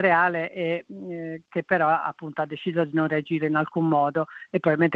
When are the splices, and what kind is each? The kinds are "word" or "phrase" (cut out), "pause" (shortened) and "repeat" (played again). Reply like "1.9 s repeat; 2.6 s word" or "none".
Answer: none

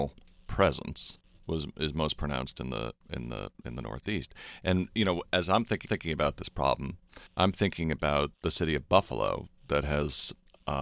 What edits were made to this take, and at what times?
5.8 s repeat; 7.3 s pause; 8.3 s pause

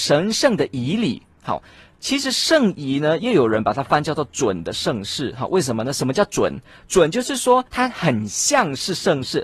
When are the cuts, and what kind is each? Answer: 7.7 s pause

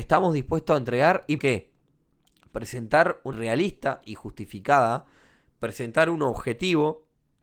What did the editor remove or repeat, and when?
1.4 s word; 3.3 s word

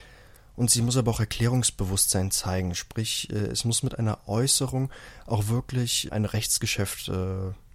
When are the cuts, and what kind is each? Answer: 6.1 s word

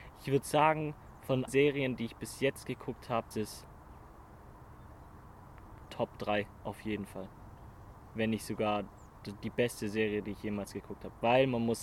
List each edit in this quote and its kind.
1.5 s word; 3.3 s word

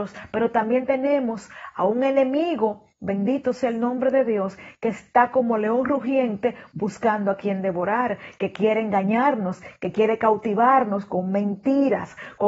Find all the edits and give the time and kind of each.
none

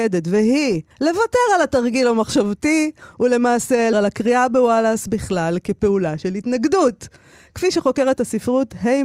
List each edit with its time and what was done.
0.9 s pause; 3.9 s word

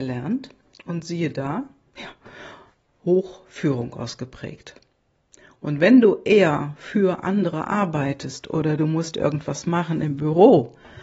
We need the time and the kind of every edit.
none

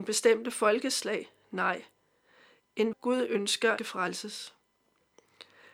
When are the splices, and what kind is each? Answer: 2.9 s word; 3.8 s phrase

